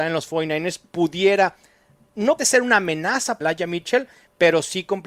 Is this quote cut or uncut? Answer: cut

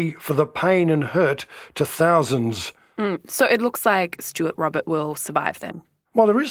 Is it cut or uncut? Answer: uncut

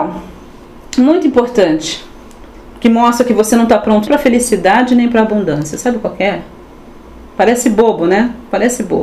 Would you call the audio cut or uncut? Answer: cut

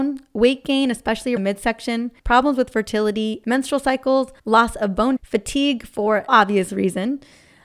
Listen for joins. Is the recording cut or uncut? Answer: cut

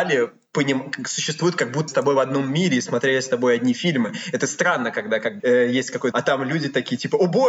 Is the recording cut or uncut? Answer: cut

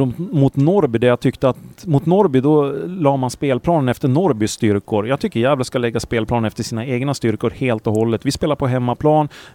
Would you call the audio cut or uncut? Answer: uncut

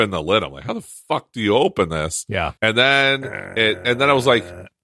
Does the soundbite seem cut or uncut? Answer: cut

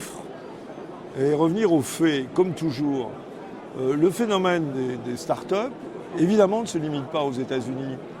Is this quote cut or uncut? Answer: uncut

